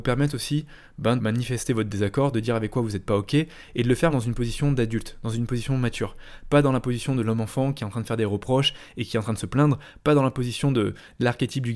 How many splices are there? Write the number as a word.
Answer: two